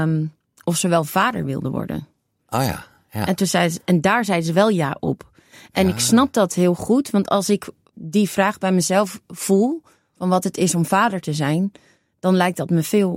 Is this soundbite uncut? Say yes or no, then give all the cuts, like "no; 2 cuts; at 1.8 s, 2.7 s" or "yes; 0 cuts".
no; 1 cut; at 7.9 s